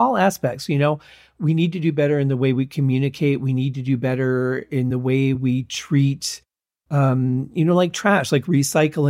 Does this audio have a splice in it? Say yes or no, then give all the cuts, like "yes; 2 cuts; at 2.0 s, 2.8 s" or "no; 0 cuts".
no; 0 cuts